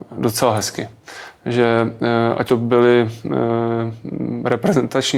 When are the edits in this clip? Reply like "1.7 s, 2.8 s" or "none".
2.5 s